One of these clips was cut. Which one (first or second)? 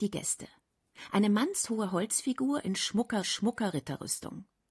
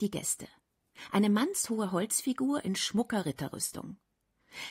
first